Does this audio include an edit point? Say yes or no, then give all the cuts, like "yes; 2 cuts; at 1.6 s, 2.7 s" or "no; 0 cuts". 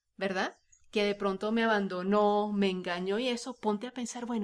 no; 0 cuts